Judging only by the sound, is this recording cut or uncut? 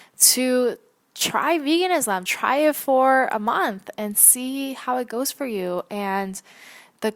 cut